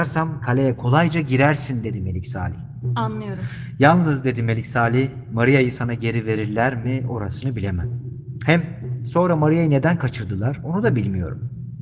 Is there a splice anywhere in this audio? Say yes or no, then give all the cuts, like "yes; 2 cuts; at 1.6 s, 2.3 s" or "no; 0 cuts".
no; 0 cuts